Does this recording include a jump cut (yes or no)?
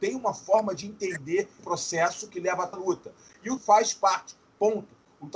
yes